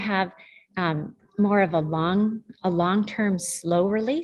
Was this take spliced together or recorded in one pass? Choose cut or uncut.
cut